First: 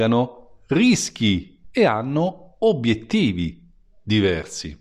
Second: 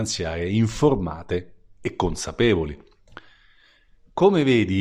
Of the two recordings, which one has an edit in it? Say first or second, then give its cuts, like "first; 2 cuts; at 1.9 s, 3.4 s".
first; 1 cut; at 1.6 s